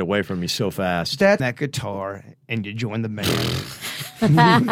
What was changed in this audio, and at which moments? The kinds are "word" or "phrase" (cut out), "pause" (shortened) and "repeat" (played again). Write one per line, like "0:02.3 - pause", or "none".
0:01.4 - phrase